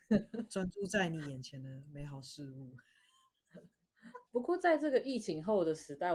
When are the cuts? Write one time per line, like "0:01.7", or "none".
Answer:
0:04.3

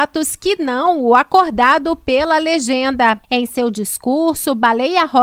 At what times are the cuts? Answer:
none

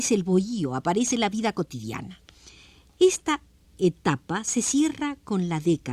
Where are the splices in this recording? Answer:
none

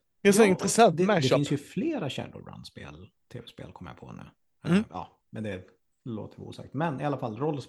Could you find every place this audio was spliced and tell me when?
none

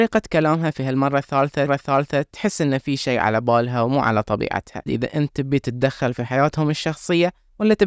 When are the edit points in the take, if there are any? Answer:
0:01.7
0:04.9

